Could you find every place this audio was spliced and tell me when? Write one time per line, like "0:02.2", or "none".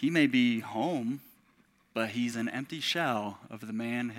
none